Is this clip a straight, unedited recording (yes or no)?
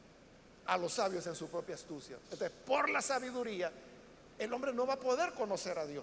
yes